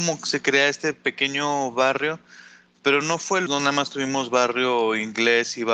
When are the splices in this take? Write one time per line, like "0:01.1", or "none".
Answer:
0:03.5